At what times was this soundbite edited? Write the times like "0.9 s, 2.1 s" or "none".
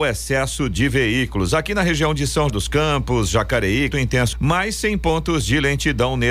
2.5 s, 3.9 s, 4.3 s